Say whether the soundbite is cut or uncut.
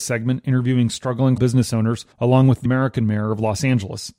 cut